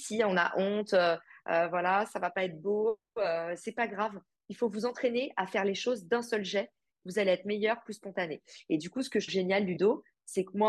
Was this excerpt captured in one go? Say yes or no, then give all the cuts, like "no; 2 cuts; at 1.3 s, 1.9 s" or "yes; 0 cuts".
no; 1 cut; at 9.3 s